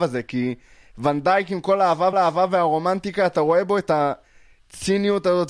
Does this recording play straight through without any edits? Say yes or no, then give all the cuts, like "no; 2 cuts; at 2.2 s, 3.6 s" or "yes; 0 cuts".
no; 1 cut; at 2.1 s